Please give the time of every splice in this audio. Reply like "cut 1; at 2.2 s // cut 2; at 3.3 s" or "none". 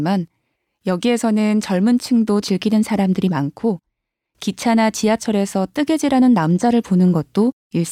cut 1; at 2.4 s